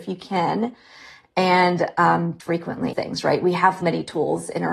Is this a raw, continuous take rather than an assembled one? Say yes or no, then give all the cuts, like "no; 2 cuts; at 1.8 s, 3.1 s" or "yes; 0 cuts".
no; 3 cuts; at 2.4 s, 2.9 s, 3.8 s